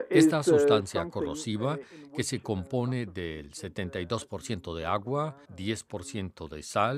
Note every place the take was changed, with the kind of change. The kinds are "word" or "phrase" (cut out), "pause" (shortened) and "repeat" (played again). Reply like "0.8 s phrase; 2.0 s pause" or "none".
5.4 s pause